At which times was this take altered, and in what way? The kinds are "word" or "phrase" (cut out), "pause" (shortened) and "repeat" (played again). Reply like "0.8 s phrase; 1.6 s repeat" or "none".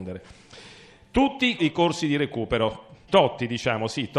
1.6 s word; 3.1 s word